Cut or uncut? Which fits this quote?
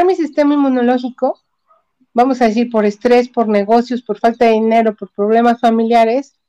uncut